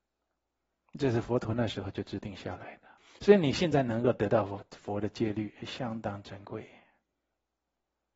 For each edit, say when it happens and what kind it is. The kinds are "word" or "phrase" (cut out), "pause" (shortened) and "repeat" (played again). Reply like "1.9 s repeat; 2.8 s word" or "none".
3.0 s pause